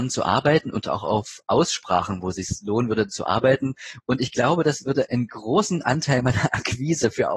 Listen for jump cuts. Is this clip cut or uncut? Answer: uncut